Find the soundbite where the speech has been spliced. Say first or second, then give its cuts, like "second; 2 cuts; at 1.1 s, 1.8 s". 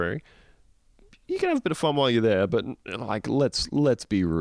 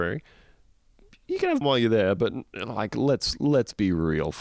second; 1 cut; at 1.6 s